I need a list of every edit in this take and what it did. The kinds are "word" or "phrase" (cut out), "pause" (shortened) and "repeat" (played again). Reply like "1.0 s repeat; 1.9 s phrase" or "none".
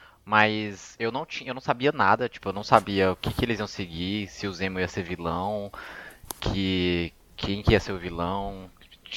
none